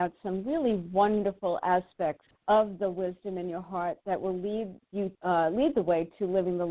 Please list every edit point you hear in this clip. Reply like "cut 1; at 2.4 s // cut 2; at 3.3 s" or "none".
cut 1; at 2.4 s // cut 2; at 5.1 s